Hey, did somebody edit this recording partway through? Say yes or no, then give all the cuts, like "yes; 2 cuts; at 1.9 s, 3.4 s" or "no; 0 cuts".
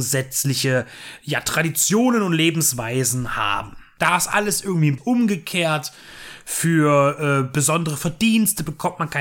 yes; 1 cut; at 5.0 s